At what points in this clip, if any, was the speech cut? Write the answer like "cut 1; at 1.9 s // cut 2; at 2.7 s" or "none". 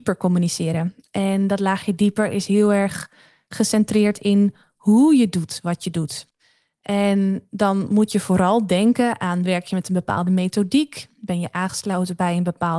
none